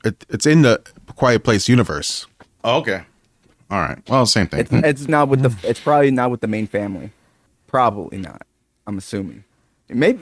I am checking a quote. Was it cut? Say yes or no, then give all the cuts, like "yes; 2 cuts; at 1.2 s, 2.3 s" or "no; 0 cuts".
yes; 1 cut; at 5.1 s